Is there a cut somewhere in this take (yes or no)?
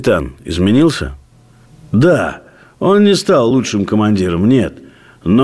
no